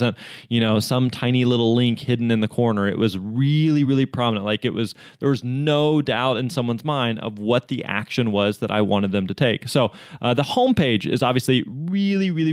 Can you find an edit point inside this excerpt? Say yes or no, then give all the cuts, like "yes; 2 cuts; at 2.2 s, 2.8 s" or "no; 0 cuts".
no; 0 cuts